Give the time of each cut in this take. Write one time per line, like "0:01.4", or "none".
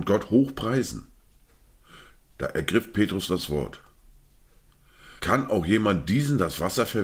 0:05.2